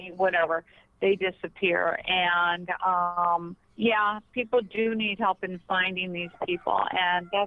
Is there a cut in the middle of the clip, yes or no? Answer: yes